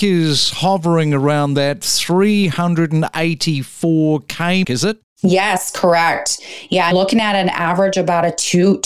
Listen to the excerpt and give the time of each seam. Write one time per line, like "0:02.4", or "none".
0:04.6
0:06.9